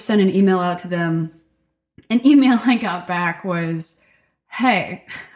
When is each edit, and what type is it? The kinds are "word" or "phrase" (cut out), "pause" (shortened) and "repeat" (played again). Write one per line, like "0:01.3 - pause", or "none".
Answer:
none